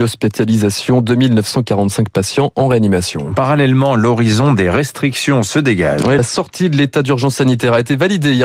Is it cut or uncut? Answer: uncut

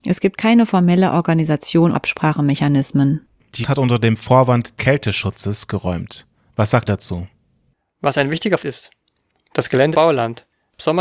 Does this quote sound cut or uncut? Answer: cut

